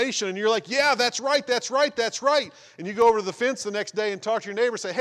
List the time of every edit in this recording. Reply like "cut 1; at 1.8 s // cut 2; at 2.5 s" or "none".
none